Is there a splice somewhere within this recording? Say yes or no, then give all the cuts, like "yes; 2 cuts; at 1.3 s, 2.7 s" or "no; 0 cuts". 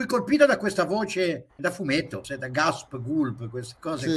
yes; 2 cuts; at 1.6 s, 2.2 s